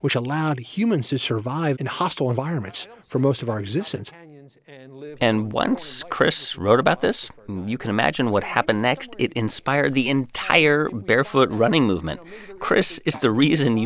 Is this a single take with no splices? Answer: yes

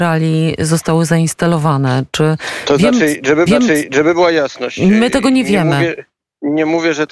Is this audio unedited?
no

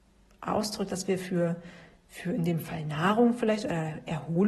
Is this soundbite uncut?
yes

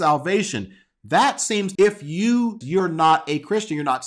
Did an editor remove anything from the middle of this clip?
yes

